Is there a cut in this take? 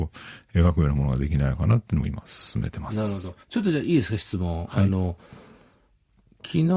yes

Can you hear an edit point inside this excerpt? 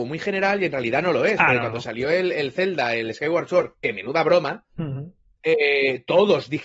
no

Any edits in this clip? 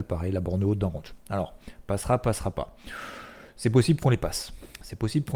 no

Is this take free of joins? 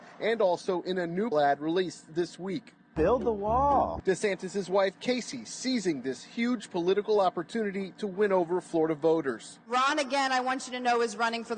no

